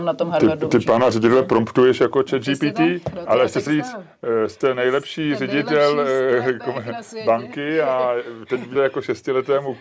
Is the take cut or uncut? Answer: cut